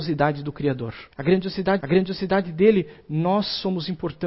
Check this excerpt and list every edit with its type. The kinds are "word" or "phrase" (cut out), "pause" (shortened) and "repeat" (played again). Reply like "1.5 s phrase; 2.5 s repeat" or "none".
1.1 s pause; 1.8 s repeat

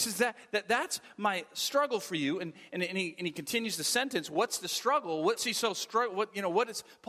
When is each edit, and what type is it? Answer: 5.4 s word

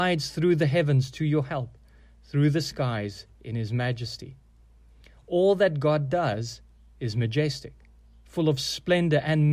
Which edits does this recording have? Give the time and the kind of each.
none

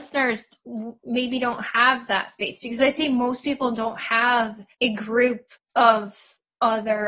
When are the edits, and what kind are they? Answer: 4.7 s pause; 5.5 s pause

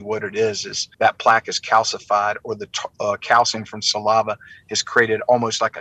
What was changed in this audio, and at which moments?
0.9 s pause

